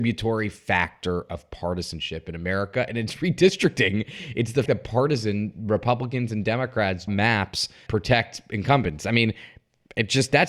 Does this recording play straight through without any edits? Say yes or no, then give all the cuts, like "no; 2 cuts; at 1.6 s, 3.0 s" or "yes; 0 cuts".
no; 3 cuts; at 4.7 s, 7.1 s, 7.9 s